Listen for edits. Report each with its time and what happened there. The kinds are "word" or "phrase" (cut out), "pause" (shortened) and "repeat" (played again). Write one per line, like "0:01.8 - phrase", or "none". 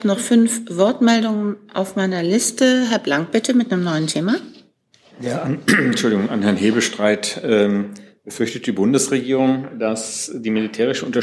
none